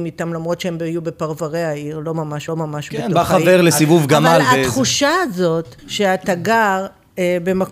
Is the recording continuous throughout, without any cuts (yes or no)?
no